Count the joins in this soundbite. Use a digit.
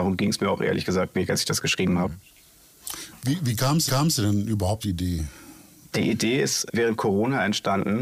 3